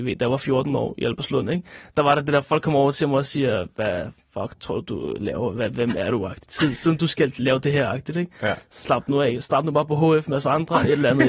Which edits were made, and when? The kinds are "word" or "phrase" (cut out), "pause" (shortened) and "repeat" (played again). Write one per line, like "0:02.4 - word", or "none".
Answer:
none